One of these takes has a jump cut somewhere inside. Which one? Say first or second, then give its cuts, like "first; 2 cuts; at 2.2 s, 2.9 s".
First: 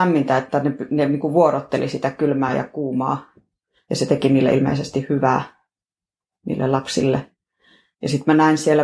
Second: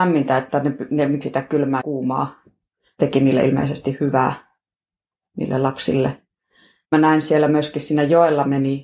second; 4 cuts; at 1.2 s, 1.8 s, 3.0 s, 6.9 s